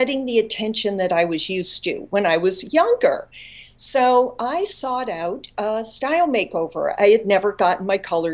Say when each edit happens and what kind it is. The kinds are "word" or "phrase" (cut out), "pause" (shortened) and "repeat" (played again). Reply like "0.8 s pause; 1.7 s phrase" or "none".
none